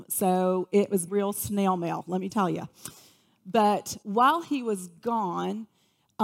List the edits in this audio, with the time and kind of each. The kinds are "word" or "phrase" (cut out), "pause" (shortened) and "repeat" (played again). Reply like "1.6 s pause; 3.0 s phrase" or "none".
1.1 s word; 2.3 s word; 4.0 s pause